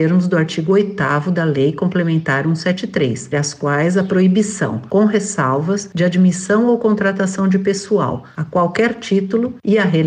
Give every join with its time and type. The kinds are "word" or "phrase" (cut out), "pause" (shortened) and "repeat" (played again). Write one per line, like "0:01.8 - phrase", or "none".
0:03.3 - word